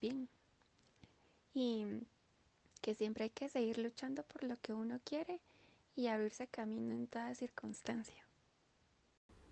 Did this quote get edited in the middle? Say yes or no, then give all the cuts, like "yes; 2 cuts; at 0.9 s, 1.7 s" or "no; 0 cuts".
no; 0 cuts